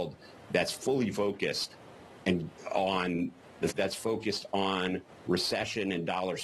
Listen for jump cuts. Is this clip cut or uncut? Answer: cut